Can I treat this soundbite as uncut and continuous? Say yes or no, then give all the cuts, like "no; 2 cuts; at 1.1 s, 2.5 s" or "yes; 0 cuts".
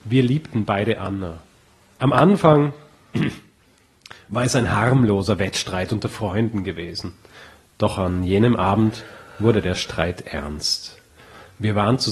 yes; 0 cuts